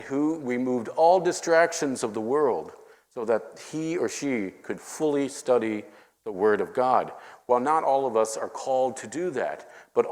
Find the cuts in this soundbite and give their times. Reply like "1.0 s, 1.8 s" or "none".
none